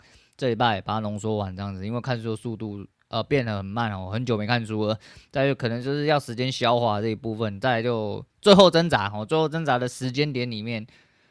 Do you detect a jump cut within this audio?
no; 0 cuts

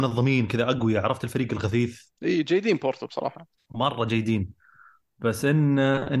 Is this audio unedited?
no; 2 cuts; at 2.2 s, 3.6 s

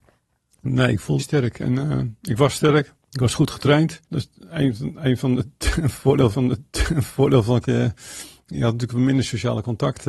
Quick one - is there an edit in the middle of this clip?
yes; 5 cuts; at 1.2 s, 3.0 s, 4.0 s, 6.3 s, 7.6 s

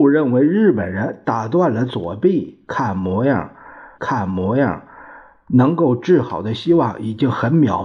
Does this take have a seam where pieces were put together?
yes; 1 cut; at 3.9 s

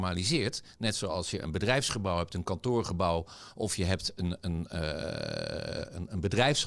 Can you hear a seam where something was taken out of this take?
no; 0 cuts

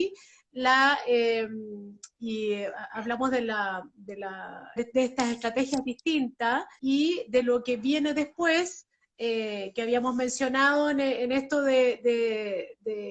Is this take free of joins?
no; 3 cuts; at 2.1 s, 4.8 s, 6.8 s

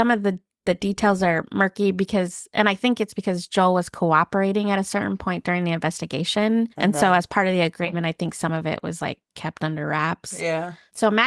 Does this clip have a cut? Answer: yes; 1 cut; at 6.7 s

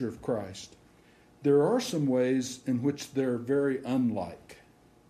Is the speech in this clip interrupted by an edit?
no; 0 cuts

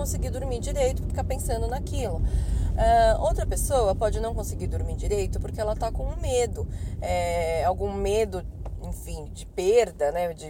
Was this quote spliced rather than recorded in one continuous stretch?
yes; 2 cuts; at 1.1 s, 9.3 s

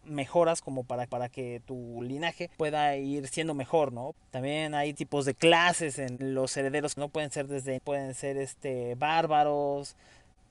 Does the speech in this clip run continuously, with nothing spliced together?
no; 5 cuts; at 1.1 s, 2.5 s, 4.9 s, 7.0 s, 7.8 s

